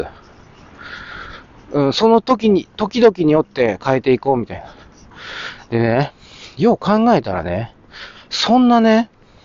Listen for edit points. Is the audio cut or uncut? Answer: uncut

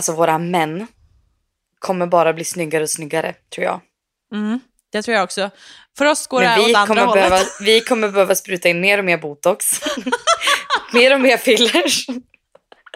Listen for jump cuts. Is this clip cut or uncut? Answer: uncut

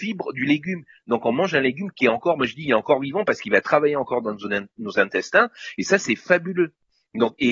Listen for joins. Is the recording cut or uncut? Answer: uncut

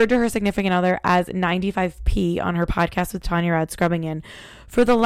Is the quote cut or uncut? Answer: uncut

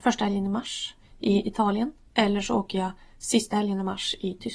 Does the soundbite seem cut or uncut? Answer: uncut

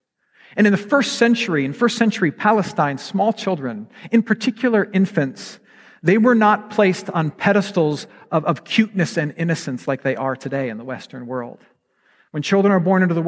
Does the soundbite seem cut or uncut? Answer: uncut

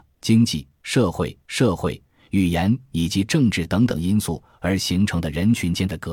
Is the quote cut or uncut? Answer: cut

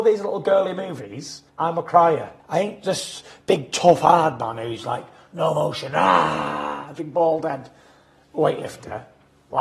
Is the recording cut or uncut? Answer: cut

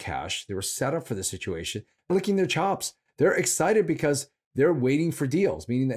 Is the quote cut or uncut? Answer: cut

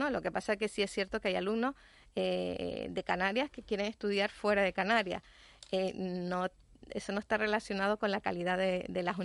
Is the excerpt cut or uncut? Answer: uncut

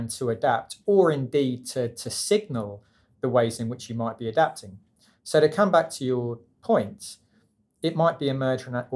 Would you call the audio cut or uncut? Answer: uncut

